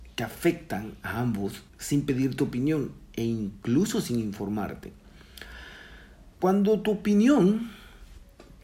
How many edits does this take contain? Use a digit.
2